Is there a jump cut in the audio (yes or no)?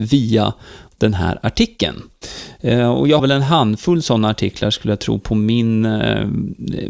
yes